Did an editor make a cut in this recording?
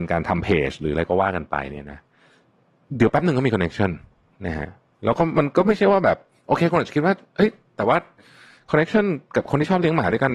no; 0 cuts

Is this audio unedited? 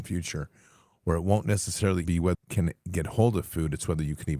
no; 2 cuts; at 2.0 s, 2.3 s

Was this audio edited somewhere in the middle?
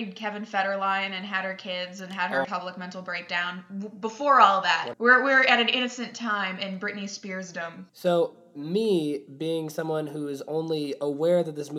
yes; 3 cuts; at 2.4 s, 4.9 s, 7.9 s

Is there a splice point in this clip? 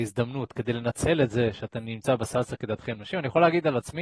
no; 0 cuts

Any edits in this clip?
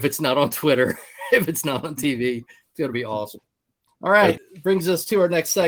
no; 0 cuts

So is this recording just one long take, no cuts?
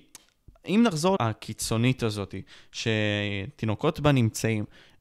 no; 1 cut; at 1.2 s

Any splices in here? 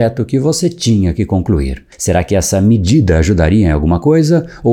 yes; 1 cut; at 1.9 s

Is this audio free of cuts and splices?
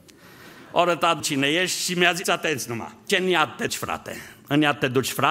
no; 4 cuts; at 1.2 s, 2.2 s, 3.1 s, 3.7 s

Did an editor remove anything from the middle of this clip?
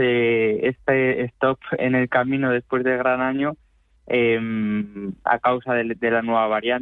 yes; 1 cut; at 1.8 s

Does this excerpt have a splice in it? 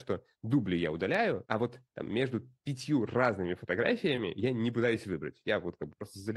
no; 0 cuts

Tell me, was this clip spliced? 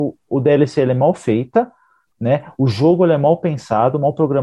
no; 0 cuts

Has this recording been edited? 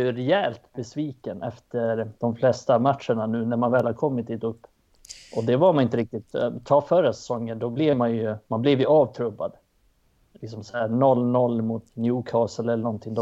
yes; 3 cuts; at 2.2 s, 8.4 s, 11.9 s

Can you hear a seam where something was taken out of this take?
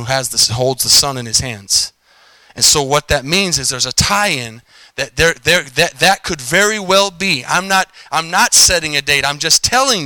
no; 0 cuts

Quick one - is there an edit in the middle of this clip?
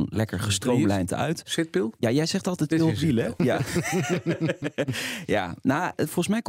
yes; 2 cuts; at 1.9 s, 2.7 s

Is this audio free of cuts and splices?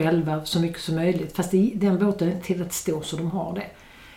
yes; 0 cuts

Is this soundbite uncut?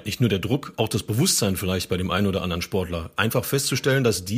yes; 0 cuts

